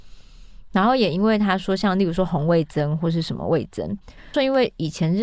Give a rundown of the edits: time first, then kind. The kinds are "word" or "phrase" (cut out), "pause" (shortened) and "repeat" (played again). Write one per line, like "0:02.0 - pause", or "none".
0:04.3 - phrase